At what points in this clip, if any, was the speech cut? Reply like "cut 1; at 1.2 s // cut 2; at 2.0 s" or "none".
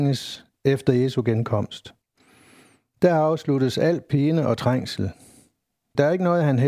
none